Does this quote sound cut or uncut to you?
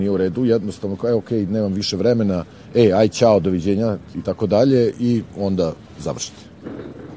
uncut